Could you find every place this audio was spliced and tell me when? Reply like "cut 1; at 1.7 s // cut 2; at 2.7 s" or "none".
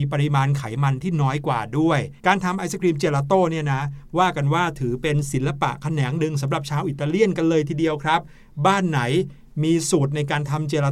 cut 1; at 2.2 s